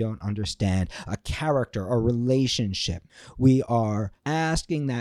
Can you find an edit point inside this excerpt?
no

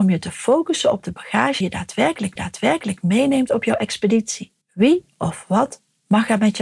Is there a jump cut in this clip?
yes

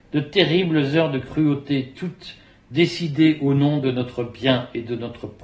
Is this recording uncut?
yes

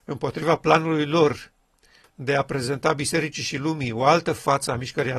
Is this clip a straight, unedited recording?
yes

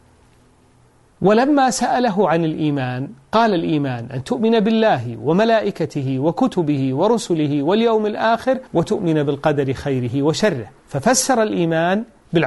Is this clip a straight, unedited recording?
no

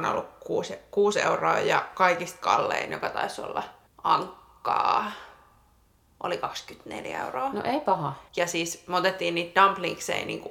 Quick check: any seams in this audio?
yes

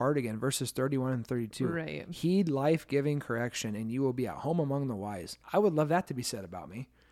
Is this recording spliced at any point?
yes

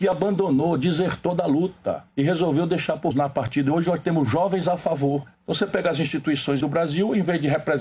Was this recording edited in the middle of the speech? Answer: yes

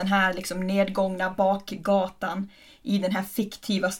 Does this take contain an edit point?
no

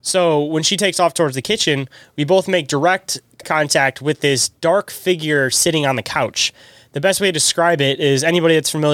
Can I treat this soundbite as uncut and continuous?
no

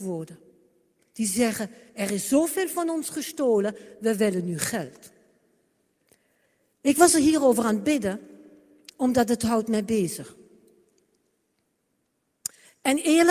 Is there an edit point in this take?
no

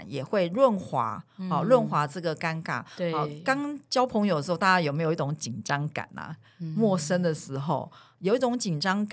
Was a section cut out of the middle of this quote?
no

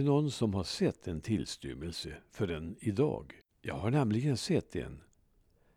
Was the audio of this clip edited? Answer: yes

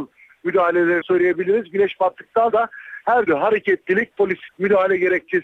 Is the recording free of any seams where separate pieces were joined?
no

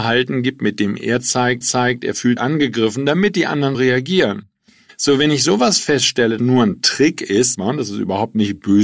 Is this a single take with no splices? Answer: no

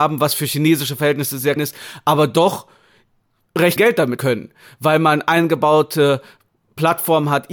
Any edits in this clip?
yes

